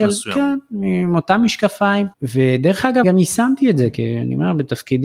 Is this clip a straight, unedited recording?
no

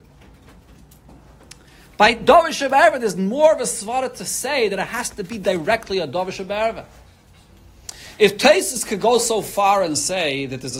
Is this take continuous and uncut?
yes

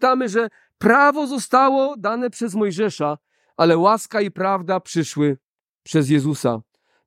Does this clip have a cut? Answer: no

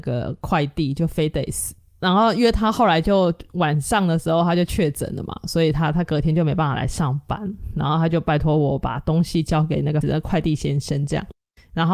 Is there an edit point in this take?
yes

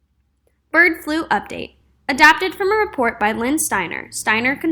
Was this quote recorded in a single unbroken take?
yes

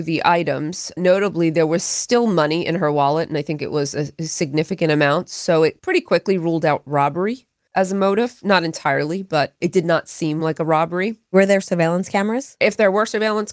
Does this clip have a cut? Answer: no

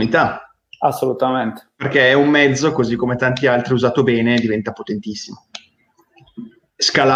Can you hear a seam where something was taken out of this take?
no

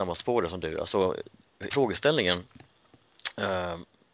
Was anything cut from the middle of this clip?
yes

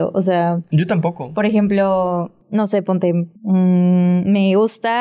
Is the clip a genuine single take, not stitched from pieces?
no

